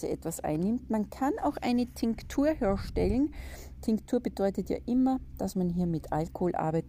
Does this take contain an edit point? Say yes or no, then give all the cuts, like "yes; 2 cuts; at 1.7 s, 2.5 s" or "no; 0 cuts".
no; 0 cuts